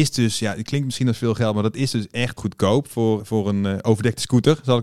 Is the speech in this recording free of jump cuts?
no; 2 cuts; at 2.4 s, 3.2 s

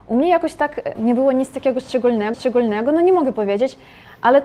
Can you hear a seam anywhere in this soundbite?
yes; 2 cuts; at 0.9 s, 2.3 s

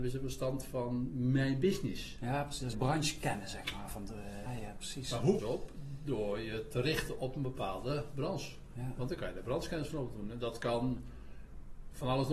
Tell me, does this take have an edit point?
yes; 3 cuts; at 2.7 s, 4.5 s, 5.4 s

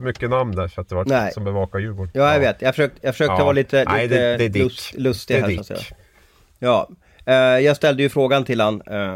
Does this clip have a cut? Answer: no; 0 cuts

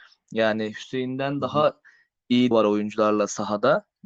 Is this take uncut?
no; 1 cut; at 2.5 s

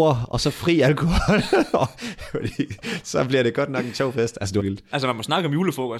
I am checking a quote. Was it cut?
yes; 1 cut; at 4.6 s

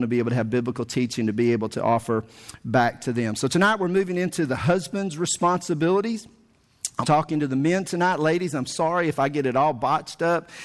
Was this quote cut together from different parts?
yes; 1 cut; at 7.0 s

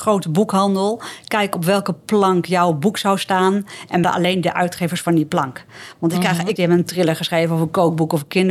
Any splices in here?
yes; 2 cuts; at 4.0 s, 6.6 s

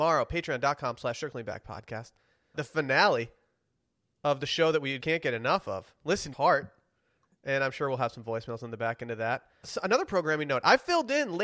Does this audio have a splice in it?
yes; 4 cuts; at 2.5 s, 5.0 s, 6.3 s, 9.6 s

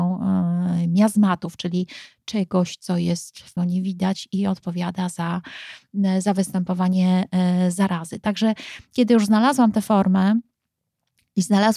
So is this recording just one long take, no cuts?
no; 1 cut; at 3.6 s

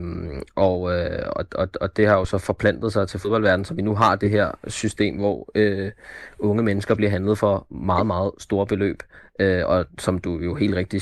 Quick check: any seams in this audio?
no; 0 cuts

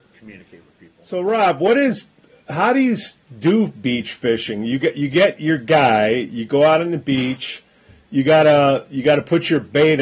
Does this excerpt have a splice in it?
no; 0 cuts

